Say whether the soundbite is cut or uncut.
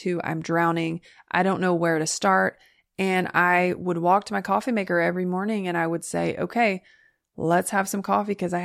uncut